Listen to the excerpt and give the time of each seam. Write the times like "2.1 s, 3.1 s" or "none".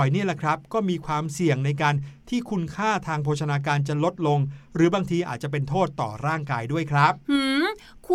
none